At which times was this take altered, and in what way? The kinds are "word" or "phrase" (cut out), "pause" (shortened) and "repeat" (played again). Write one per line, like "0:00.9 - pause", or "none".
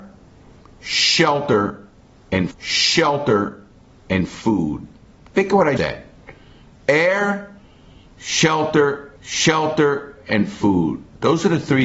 0:02.5 - repeat
0:05.8 - word
0:09.2 - repeat